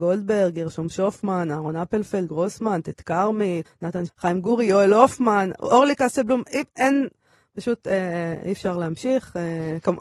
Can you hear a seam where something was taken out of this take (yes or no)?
yes